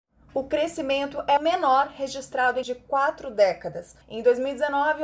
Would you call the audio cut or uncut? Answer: cut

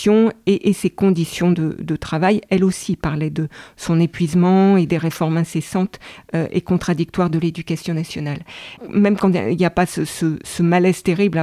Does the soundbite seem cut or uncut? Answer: uncut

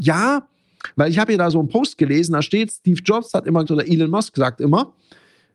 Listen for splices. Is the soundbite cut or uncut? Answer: cut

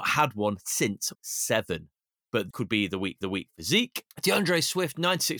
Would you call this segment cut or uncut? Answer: cut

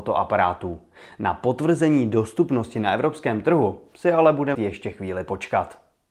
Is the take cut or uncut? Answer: cut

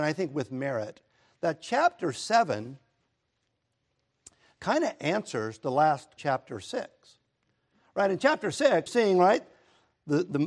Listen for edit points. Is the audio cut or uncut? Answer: cut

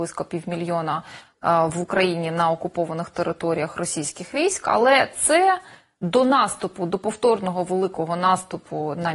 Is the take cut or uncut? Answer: uncut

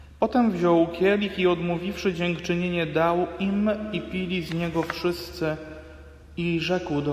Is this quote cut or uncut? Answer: uncut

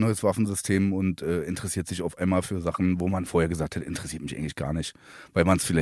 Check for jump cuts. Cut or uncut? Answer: uncut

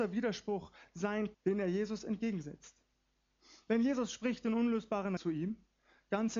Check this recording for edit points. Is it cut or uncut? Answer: cut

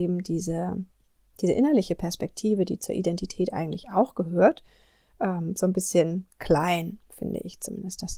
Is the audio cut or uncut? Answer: uncut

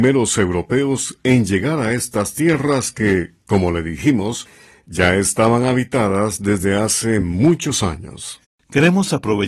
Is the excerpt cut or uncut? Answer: uncut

